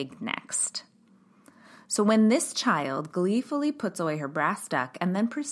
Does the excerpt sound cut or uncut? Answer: uncut